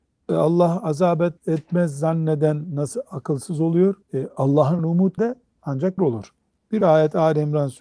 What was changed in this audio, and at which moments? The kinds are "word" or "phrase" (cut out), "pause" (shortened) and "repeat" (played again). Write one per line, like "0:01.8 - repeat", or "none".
0:01.4 - pause
0:04.0 - pause
0:04.8 - word
0:05.2 - word
0:06.0 - word
0:06.8 - word